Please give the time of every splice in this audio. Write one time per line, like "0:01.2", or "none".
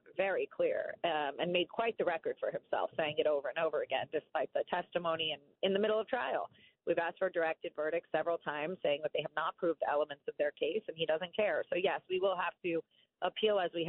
none